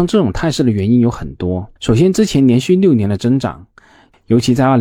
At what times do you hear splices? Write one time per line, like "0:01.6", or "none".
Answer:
0:01.8